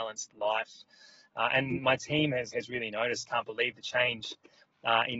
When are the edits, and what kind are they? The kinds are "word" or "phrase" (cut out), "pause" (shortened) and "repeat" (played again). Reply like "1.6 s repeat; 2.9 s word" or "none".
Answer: 2.5 s word; 3.2 s phrase